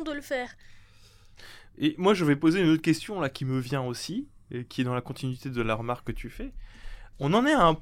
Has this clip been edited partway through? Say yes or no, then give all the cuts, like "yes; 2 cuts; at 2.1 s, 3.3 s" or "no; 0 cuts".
no; 0 cuts